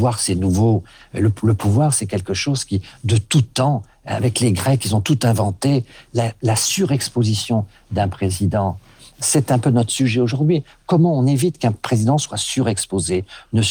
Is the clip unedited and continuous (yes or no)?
yes